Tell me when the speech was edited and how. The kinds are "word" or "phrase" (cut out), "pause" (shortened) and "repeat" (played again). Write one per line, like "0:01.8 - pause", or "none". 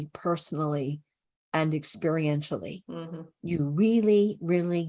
none